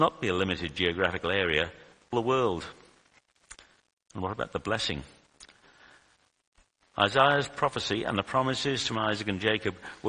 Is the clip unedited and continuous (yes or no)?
no